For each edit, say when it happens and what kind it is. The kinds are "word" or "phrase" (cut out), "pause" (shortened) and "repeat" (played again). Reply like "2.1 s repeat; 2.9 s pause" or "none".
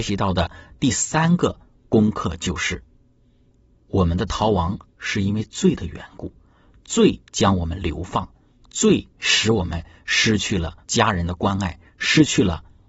4.9 s pause; 7.3 s pause; 9.1 s pause; 10.8 s pause